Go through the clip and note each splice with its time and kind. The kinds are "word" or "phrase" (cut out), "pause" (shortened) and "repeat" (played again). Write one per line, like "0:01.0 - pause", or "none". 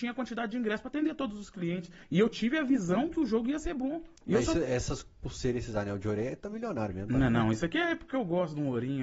0:04.2 - pause